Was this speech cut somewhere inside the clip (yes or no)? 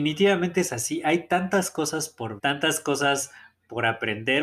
yes